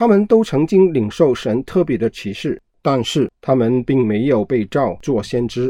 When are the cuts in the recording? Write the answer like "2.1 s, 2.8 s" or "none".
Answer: 2.7 s